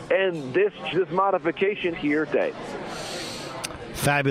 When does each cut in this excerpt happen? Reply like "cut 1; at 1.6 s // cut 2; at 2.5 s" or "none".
cut 1; at 0.9 s // cut 2; at 1.9 s // cut 3; at 2.3 s

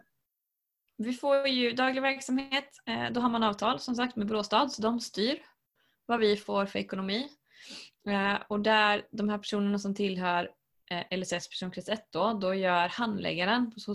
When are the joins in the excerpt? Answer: none

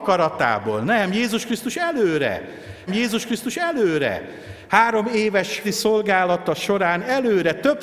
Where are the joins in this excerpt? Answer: cut 1; at 2.9 s // cut 2; at 5.6 s

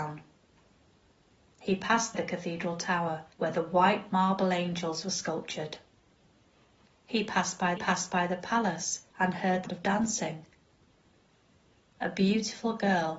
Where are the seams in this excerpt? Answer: cut 1; at 2.1 s // cut 2; at 3.3 s // cut 3; at 7.8 s // cut 4; at 9.1 s // cut 5; at 9.7 s

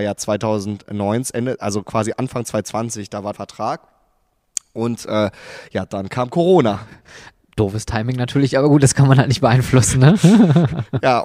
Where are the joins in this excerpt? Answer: cut 1; at 3.3 s

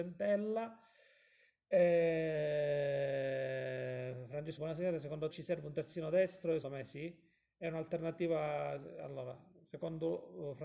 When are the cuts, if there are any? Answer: cut 1; at 4.6 s // cut 2; at 5.3 s // cut 3; at 6.6 s

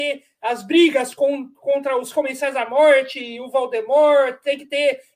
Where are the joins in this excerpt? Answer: none

